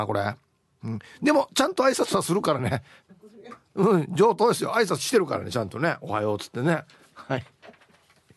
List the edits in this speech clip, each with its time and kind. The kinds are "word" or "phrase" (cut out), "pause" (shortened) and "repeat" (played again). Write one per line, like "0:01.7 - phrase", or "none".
none